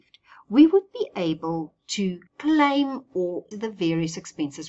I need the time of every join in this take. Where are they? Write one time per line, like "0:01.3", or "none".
0:02.3
0:03.5